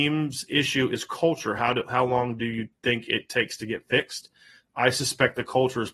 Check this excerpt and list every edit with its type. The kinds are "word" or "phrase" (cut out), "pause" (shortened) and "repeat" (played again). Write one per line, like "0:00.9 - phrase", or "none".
none